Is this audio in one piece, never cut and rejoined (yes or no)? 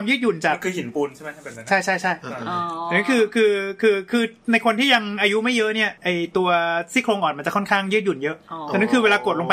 no